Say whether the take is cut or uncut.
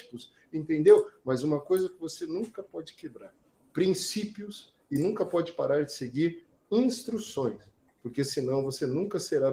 uncut